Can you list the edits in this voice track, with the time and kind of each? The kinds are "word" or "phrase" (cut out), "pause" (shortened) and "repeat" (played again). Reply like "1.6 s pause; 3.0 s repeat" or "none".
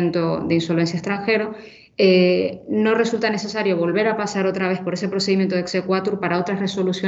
none